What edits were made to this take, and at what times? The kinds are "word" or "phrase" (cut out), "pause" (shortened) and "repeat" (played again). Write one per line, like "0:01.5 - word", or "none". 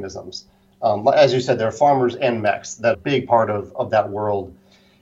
0:02.9 - phrase